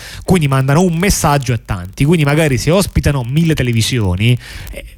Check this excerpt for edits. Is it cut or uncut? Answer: uncut